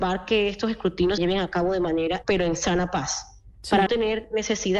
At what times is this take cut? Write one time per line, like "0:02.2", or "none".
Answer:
0:01.2
0:02.2
0:03.9